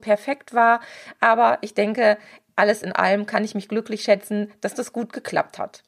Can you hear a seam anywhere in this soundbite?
no; 0 cuts

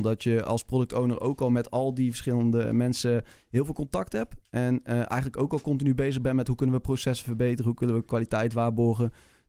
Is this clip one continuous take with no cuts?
yes; 0 cuts

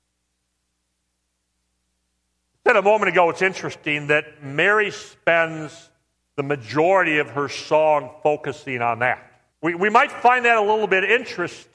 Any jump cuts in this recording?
yes; 2 cuts; at 6.1 s, 9.5 s

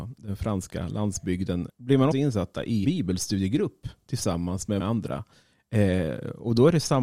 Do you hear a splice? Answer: yes; 4 cuts; at 1.7 s, 2.1 s, 2.8 s, 4.8 s

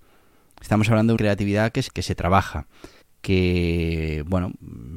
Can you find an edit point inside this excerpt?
yes; 3 cuts; at 1.2 s, 1.9 s, 3.0 s

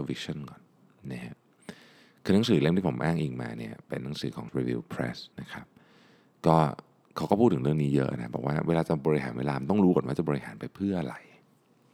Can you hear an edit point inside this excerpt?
yes; 2 cuts; at 4.5 s, 5.3 s

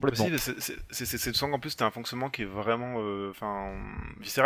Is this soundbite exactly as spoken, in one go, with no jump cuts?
yes; 0 cuts

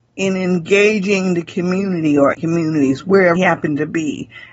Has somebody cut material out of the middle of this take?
yes; 2 cuts; at 2.3 s, 3.4 s

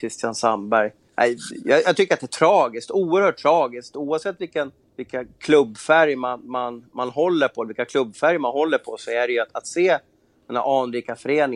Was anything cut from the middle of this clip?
yes; 2 cuts; at 1.1 s, 4.8 s

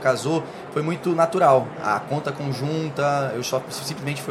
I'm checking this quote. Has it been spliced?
no; 0 cuts

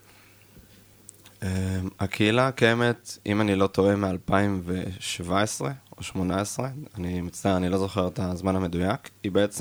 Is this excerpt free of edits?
yes; 0 cuts

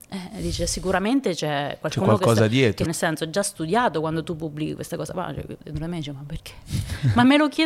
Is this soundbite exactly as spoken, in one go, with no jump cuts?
no; 1 cut; at 2.9 s

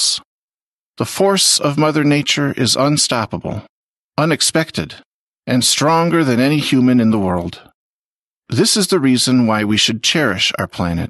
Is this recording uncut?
yes; 0 cuts

